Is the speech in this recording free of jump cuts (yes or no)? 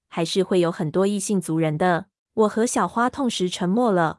no